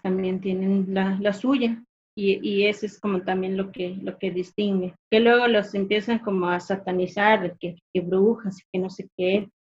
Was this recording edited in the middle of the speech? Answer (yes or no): yes